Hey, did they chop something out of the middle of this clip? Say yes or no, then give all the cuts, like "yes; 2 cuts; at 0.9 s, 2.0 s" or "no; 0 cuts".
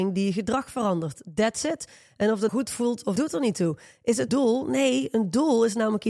yes; 3 cuts; at 2.5 s, 3.2 s, 4.3 s